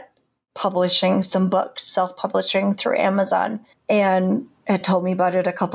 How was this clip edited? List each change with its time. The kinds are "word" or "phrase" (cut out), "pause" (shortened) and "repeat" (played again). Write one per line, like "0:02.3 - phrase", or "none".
none